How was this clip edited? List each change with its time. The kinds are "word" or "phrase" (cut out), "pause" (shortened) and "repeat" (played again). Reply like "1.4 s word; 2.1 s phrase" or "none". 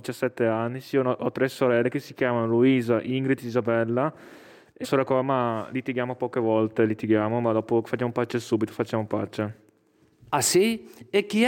4.8 s word